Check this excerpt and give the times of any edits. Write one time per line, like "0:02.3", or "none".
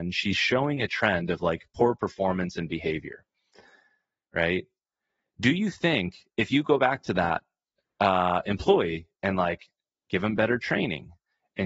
none